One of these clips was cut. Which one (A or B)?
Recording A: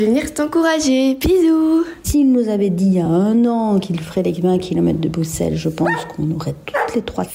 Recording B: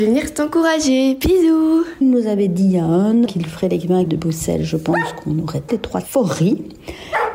B